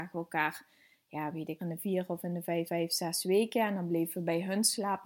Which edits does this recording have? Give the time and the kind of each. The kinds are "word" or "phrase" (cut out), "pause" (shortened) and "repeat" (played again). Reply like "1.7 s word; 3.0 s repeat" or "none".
1.6 s phrase; 2.7 s repeat